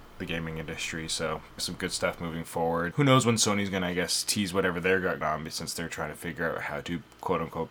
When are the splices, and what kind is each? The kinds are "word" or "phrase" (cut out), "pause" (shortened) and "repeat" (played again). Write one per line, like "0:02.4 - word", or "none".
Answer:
0:01.6 - phrase
0:02.9 - word
0:05.2 - word